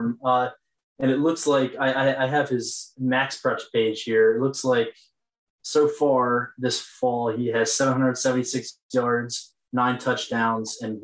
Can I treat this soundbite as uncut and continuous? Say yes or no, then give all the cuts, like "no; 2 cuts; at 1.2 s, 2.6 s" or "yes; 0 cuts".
yes; 0 cuts